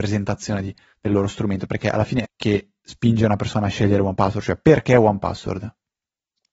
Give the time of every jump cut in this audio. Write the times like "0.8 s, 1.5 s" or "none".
2.2 s